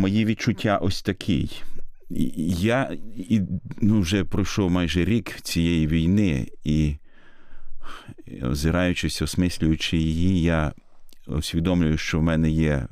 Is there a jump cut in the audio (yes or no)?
no